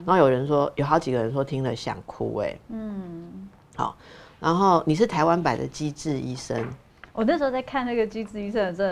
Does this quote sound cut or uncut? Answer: uncut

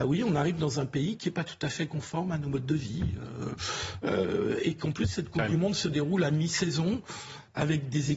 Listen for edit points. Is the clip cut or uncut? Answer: uncut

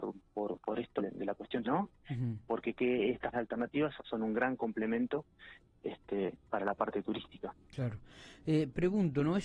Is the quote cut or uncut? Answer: cut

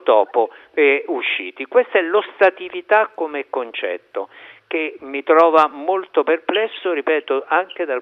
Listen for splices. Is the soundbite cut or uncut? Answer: uncut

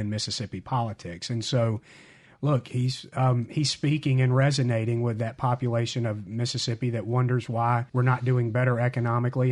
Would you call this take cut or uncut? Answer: cut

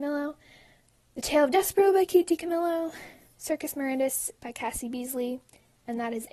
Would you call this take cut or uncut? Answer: uncut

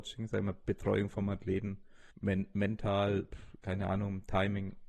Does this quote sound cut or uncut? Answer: cut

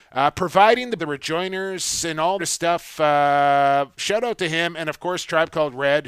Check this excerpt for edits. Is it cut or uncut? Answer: cut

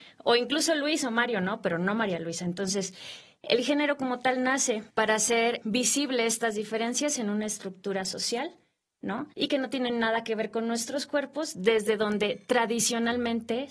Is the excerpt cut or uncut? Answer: cut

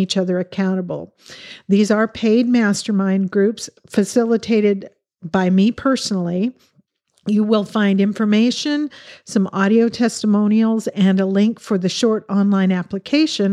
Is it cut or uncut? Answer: uncut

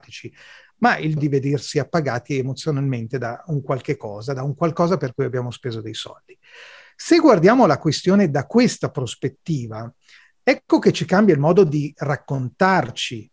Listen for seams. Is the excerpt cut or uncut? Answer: cut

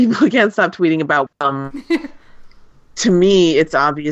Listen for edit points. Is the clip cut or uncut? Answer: cut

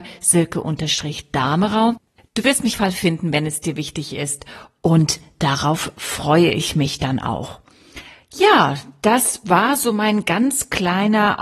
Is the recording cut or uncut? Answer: cut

